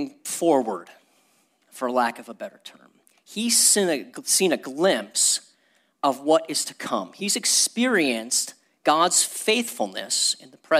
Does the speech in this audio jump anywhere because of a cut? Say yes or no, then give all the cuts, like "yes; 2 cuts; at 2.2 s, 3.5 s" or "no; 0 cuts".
no; 0 cuts